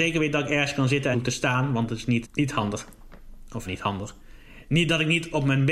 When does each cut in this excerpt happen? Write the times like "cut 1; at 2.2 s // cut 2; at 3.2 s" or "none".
cut 1; at 1.1 s // cut 2; at 2.2 s // cut 3; at 3.7 s